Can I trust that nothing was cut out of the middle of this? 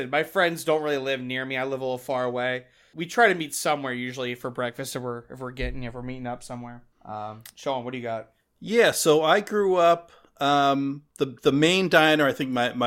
no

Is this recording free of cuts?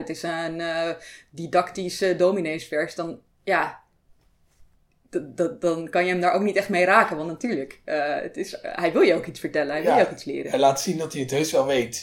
yes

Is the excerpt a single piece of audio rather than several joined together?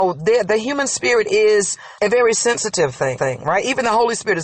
no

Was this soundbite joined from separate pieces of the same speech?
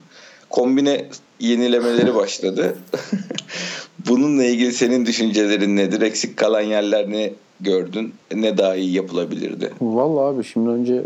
yes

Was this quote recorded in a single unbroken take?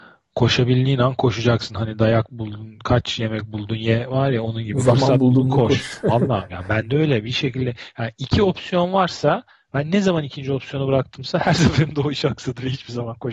no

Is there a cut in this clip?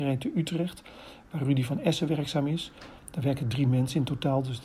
no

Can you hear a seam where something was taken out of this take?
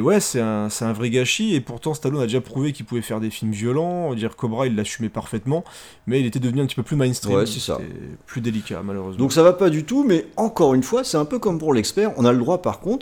no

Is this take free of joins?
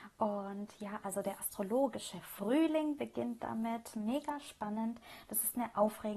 yes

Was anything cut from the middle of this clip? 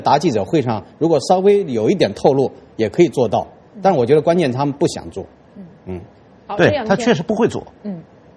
no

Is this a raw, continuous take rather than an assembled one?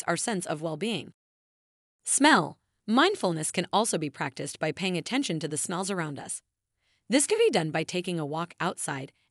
yes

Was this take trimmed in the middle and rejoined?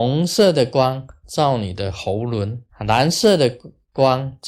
yes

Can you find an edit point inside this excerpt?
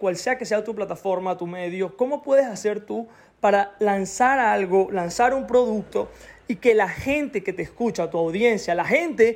no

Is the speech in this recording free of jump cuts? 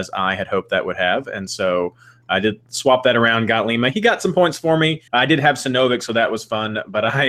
no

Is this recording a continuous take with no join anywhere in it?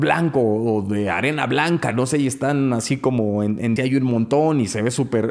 no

